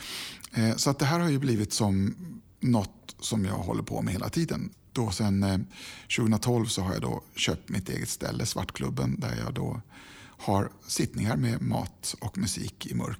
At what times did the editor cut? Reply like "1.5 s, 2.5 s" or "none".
none